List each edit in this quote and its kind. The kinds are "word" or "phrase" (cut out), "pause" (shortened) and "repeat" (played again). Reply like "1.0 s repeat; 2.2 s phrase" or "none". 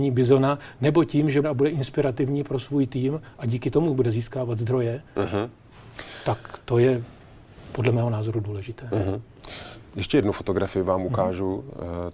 1.4 s phrase

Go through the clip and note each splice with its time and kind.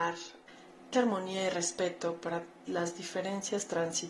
0.9 s word; 2.7 s word

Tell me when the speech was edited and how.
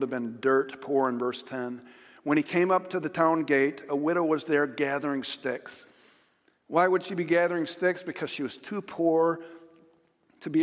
none

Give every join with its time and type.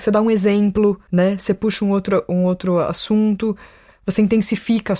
none

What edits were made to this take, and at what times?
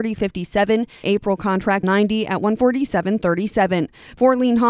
1.0 s word; 1.8 s word

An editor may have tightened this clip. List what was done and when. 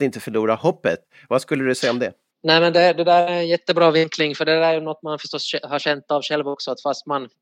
none

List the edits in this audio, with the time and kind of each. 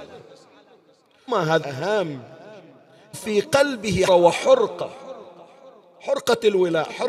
1.3 s word; 1.6 s word; 3.1 s word; 4.1 s word

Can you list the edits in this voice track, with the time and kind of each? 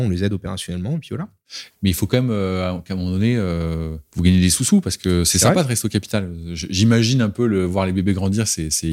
4.1 s pause

